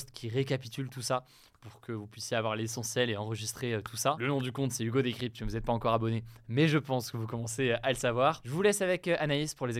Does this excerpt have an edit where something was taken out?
no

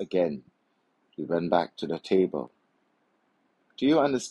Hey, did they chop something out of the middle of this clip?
no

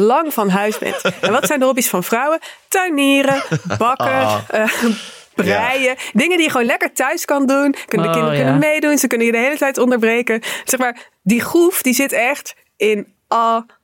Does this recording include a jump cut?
no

